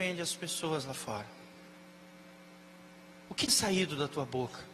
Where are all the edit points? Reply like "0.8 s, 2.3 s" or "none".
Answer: 3.5 s